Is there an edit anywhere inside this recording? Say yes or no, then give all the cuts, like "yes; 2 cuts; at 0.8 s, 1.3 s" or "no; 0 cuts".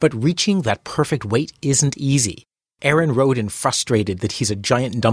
no; 0 cuts